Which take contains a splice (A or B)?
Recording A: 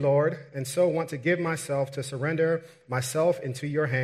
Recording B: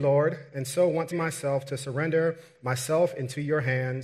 B